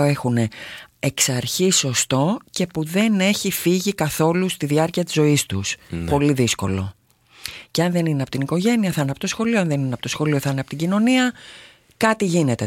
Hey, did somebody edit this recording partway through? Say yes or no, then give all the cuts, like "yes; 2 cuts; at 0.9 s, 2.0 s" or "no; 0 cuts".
no; 0 cuts